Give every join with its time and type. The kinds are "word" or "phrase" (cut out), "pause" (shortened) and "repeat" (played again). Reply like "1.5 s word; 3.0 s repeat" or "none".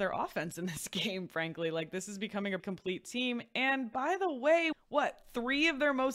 2.6 s word; 4.7 s word